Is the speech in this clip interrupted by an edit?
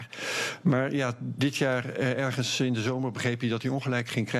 no; 0 cuts

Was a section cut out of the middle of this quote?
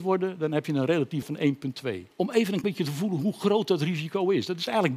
yes; 3 cuts; at 1.2 s, 2.1 s, 2.6 s

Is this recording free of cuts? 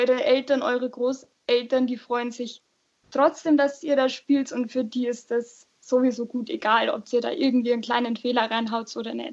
yes; 0 cuts

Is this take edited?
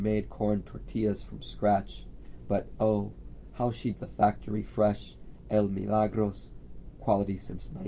yes; 1 cut; at 3.9 s

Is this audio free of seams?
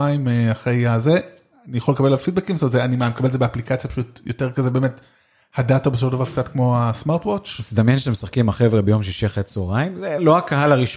yes; 0 cuts

